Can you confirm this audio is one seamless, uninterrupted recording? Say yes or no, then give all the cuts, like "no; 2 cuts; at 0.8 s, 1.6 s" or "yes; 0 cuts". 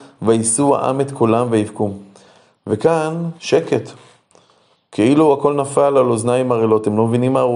no; 1 cut; at 3.4 s